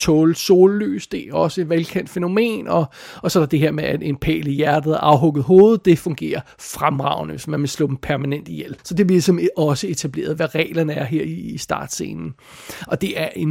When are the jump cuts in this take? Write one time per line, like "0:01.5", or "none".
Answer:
0:08.8